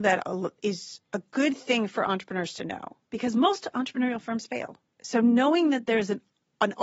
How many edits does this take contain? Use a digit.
2